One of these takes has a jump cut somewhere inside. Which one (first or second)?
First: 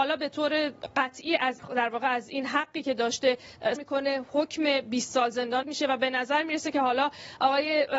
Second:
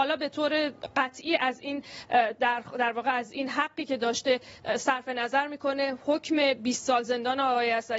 first